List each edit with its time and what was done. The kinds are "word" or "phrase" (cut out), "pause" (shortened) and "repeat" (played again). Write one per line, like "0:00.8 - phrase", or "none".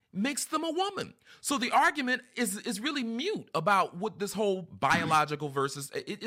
none